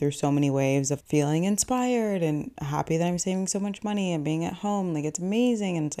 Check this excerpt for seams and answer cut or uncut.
cut